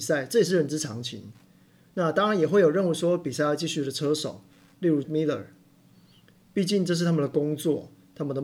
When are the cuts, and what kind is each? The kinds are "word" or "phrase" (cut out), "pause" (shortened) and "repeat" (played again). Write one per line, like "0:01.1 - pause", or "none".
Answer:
0:05.0 - word